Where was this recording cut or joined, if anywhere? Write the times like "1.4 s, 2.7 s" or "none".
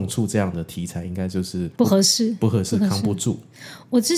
1.7 s